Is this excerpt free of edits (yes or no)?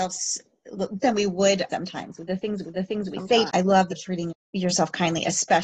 no